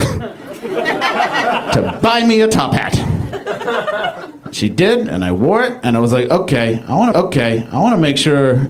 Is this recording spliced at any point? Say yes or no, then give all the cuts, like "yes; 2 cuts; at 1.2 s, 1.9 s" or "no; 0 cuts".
yes; 1 cut; at 7.1 s